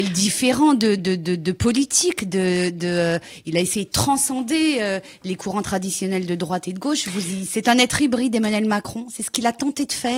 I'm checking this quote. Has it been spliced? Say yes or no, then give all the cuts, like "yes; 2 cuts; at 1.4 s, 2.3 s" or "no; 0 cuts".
no; 0 cuts